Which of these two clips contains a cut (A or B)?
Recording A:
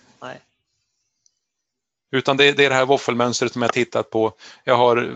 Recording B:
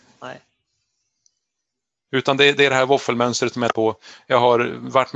B